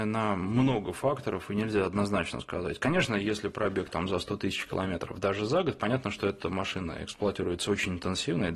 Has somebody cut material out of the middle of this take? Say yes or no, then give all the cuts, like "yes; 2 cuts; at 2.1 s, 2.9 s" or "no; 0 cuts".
no; 0 cuts